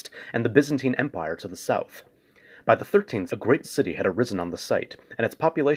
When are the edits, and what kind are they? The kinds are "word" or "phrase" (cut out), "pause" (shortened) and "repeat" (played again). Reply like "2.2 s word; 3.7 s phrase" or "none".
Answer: 3.3 s word; 3.6 s word